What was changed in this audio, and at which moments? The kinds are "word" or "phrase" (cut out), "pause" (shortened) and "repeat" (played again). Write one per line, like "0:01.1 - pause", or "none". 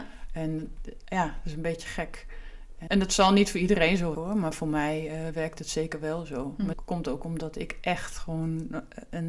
0:02.9 - word
0:04.1 - word
0:06.7 - word